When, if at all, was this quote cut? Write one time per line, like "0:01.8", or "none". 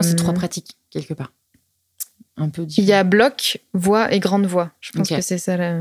none